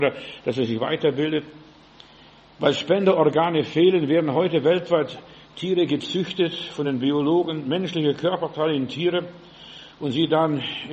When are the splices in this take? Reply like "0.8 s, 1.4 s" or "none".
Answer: none